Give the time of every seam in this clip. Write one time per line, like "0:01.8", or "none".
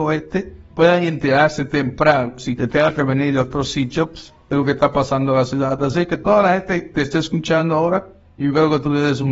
none